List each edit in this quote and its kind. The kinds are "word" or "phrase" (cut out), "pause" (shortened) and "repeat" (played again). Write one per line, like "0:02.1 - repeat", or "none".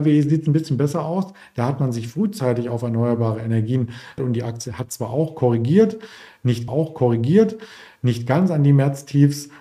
0:04.2 - word
0:06.7 - repeat